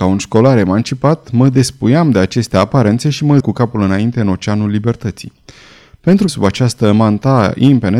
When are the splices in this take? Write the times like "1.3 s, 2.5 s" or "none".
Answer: 3.4 s, 6.3 s